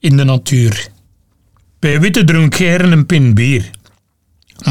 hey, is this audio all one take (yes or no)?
yes